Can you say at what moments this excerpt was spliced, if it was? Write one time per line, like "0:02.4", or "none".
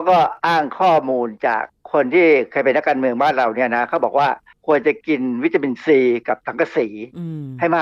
none

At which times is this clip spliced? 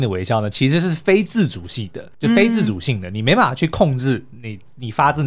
0:02.1

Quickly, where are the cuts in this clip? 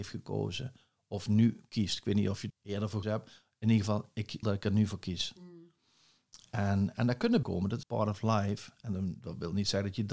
0:02.5
0:03.0
0:04.4
0:07.4
0:07.8

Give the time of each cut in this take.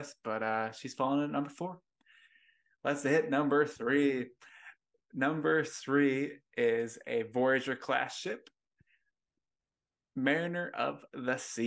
none

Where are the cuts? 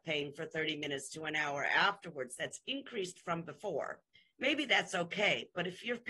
0:04.2

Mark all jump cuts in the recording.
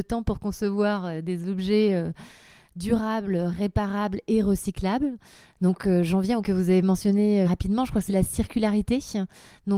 0:06.4
0:07.4
0:08.1

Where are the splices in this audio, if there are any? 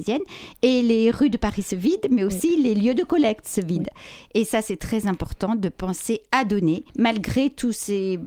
0:06.9

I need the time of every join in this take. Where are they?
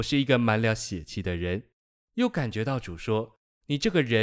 0:01.8

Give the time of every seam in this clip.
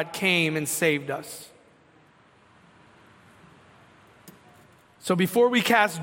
none

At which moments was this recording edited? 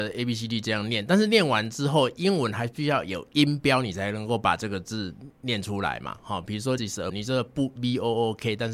0:06.8
0:07.1

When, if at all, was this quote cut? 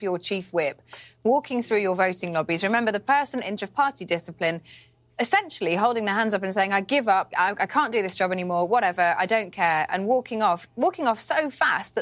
0:03.6
0:07.3

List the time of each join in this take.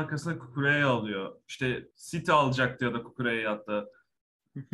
0:01.9

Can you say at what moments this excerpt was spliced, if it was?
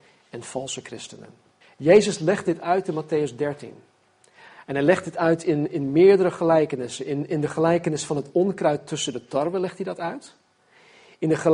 0:01.6

